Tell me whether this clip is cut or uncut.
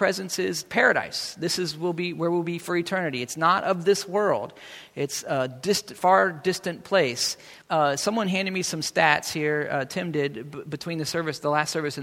cut